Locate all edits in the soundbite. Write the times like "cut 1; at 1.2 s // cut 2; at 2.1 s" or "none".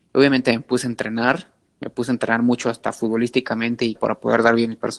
cut 1; at 3.9 s